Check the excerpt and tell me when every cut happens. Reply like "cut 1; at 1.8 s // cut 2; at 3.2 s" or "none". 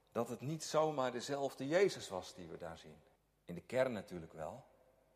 cut 1; at 3.2 s